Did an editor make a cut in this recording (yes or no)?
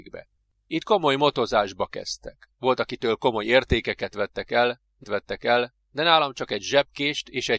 yes